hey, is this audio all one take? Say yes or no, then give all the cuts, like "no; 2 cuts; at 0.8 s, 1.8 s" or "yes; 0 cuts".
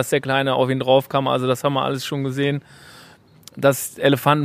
yes; 0 cuts